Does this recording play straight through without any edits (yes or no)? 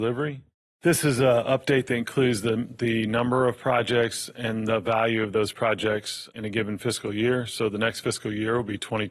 yes